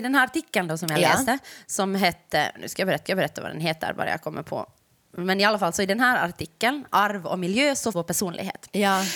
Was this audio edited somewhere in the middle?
yes; 2 cuts; at 3.0 s, 7.9 s

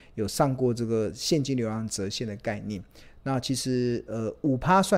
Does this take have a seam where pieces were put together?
no; 0 cuts

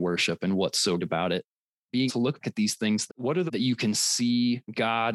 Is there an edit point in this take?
yes; 5 cuts; at 1.0 s, 2.1 s, 2.4 s, 3.1 s, 3.5 s

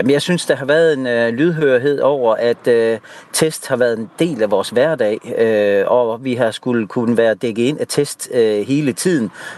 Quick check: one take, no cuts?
yes; 0 cuts

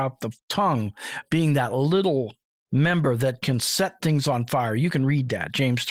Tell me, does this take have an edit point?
no; 0 cuts

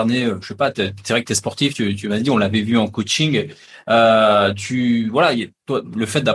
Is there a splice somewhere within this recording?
no; 0 cuts

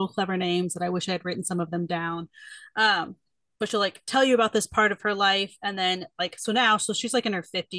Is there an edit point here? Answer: no; 0 cuts

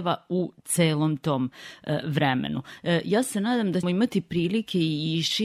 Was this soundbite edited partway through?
yes; 1 cut; at 3.8 s

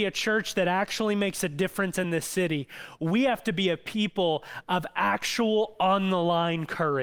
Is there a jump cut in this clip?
no; 0 cuts

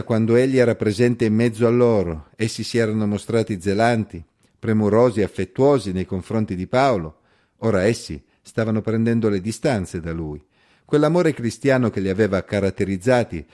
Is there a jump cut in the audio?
no; 0 cuts

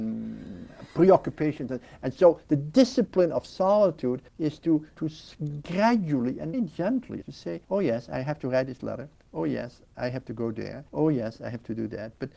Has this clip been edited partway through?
yes; 6 cuts; at 4.3 s, 4.9 s, 6.5 s, 7.2 s, 7.6 s, 10.9 s

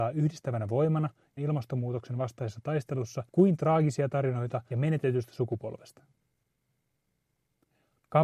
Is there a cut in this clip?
yes; 3 cuts; at 1.4 s, 3.3 s, 4.7 s

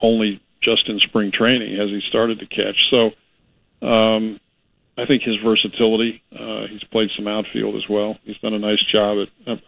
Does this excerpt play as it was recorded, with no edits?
yes; 0 cuts

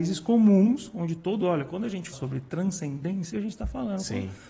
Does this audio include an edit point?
yes; 3 cuts; at 1.4 s, 2.1 s, 3.3 s

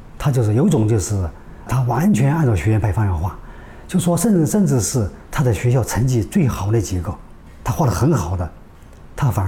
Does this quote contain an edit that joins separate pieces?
yes; 1 cut; at 1.7 s

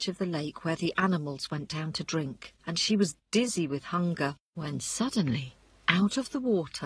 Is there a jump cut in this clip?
yes; 2 cuts; at 2.6 s, 4.4 s

